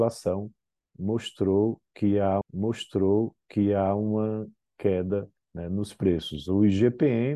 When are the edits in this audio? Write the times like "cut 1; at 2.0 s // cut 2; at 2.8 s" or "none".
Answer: cut 1; at 2.4 s